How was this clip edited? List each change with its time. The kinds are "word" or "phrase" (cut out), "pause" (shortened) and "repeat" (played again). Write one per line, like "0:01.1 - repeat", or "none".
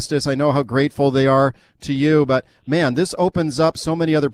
none